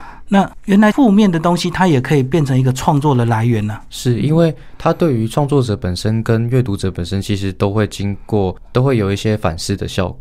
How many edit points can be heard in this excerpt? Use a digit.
0